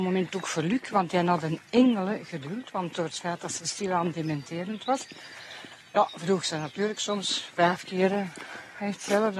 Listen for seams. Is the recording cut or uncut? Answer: uncut